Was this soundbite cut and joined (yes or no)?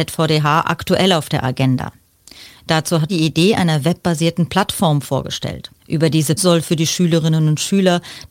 yes